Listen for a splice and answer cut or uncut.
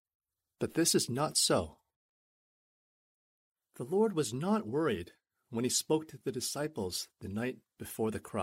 uncut